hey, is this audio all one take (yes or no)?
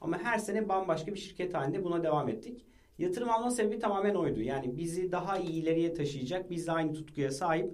yes